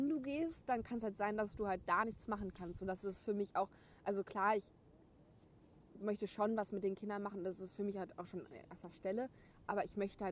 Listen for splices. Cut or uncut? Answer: uncut